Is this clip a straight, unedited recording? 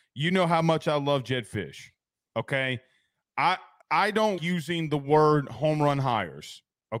no; 2 cuts; at 3.8 s, 4.4 s

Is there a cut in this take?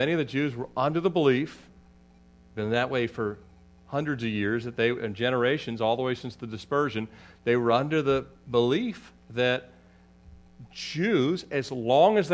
no; 0 cuts

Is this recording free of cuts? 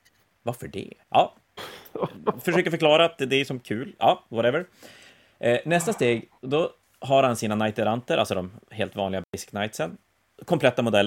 no; 1 cut; at 1.0 s

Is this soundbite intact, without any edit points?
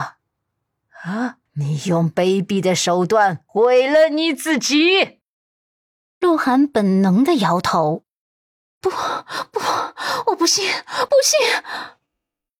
no; 2 cuts; at 1.5 s, 3.5 s

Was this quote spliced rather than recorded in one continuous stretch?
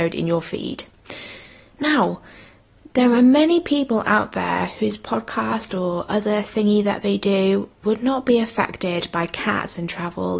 no; 0 cuts

